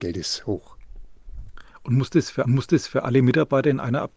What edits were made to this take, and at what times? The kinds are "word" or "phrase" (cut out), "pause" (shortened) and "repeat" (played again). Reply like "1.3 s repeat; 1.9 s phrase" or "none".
2.4 s repeat

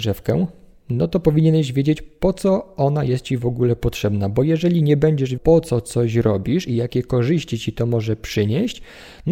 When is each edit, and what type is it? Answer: 5.4 s word

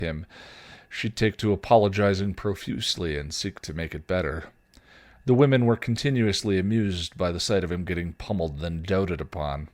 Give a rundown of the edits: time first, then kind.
none

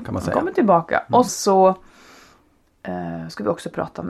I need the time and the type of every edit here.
1.3 s word

